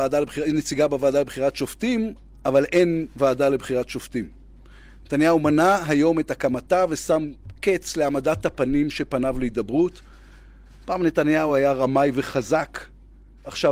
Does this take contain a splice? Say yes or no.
no